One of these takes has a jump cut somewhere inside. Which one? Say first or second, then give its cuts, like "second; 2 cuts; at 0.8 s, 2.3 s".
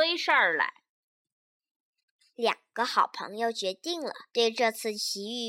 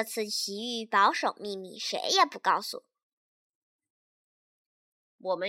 first; 1 cut; at 4.3 s